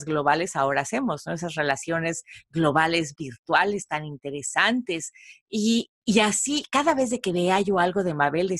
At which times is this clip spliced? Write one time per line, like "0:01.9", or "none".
none